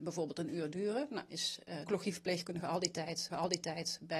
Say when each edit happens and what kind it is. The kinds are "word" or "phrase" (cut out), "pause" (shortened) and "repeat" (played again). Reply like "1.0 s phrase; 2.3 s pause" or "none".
1.3 s word; 1.9 s word; 3.3 s repeat